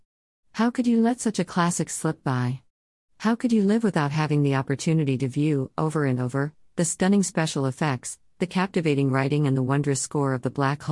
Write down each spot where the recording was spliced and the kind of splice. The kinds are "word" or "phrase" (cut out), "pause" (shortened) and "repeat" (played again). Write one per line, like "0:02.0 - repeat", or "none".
none